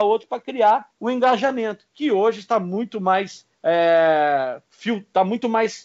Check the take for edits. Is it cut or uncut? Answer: cut